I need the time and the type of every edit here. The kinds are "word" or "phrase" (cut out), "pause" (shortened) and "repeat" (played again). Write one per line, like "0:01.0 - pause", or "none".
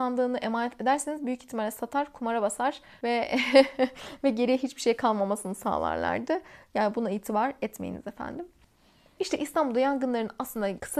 none